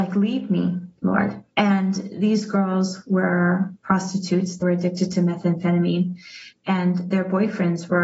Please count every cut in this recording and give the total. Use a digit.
2